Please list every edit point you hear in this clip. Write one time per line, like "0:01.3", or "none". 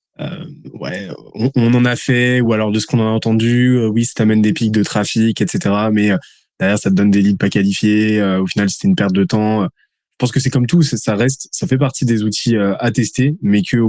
none